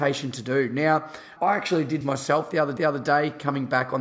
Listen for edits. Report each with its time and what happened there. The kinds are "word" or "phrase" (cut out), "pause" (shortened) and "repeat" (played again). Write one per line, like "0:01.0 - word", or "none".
0:01.4 - word
0:02.0 - word
0:02.8 - repeat

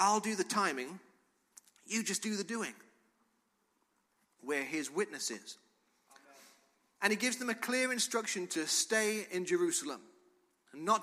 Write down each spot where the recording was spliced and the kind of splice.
none

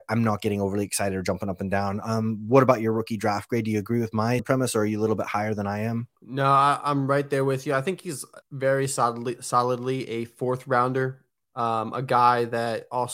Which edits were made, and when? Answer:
0:04.4 - word
0:06.2 - pause
0:08.4 - pause
0:11.4 - pause

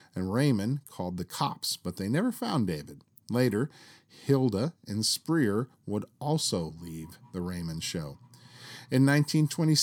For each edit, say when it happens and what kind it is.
none

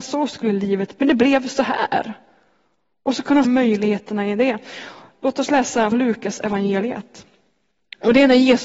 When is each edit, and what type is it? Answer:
0:01.0 - word
0:03.4 - word
0:05.9 - word

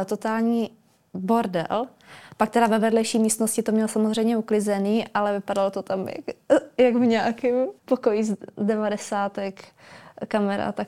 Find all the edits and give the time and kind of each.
0:07.8 - pause

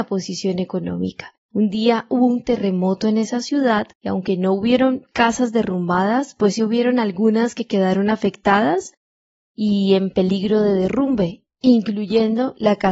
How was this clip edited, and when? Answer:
0:01.4 - pause
0:03.9 - pause

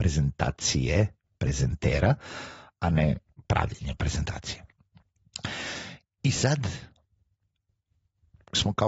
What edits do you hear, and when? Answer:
none

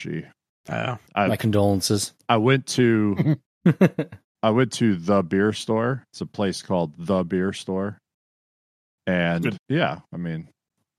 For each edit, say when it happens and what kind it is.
0:01.1 - pause
0:06.1 - pause
0:09.6 - word

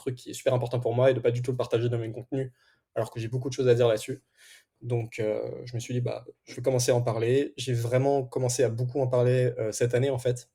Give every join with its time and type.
none

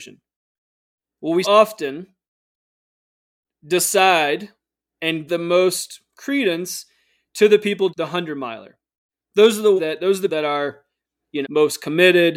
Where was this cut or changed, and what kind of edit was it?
0:01.4 - word
0:05.3 - word
0:07.9 - word
0:09.8 - word
0:10.3 - word
0:11.4 - word

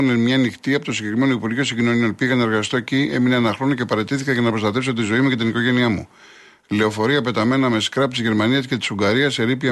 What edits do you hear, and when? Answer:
none

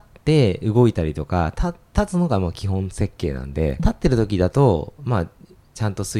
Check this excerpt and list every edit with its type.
0:03.8 - phrase

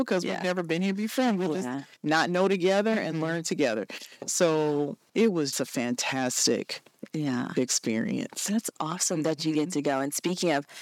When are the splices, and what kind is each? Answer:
0:02.0 - pause
0:05.1 - word
0:05.5 - word

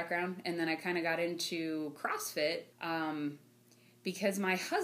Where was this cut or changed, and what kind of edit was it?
0:02.7 - pause

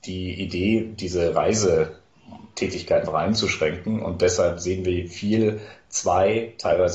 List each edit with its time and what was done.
0:03.1 - word

